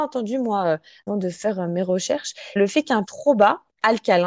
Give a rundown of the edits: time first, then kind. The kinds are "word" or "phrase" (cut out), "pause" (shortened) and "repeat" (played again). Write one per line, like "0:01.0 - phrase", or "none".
0:01.1 - word
0:02.6 - word
0:03.0 - word